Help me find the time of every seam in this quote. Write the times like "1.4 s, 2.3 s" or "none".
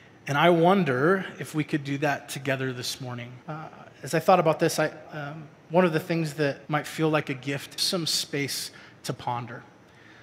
3.4 s, 5.1 s, 6.7 s, 7.8 s